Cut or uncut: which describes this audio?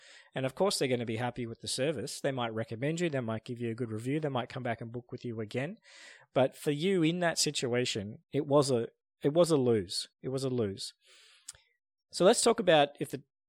cut